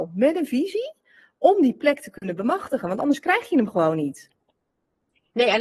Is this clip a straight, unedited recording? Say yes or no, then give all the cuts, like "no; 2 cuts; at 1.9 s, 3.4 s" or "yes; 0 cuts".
yes; 0 cuts